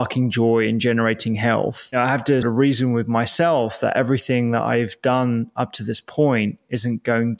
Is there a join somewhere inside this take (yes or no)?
yes